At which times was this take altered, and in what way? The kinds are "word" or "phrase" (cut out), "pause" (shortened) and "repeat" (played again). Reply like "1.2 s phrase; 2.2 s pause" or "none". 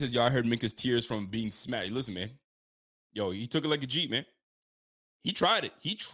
none